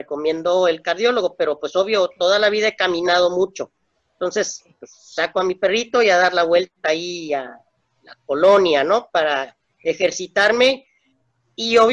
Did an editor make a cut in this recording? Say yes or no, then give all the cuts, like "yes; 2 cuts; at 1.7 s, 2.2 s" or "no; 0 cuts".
no; 0 cuts